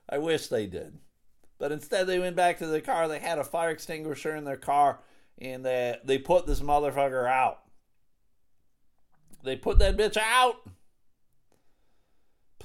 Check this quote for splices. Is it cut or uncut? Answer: uncut